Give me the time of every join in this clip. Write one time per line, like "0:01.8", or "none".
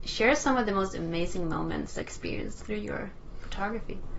0:02.0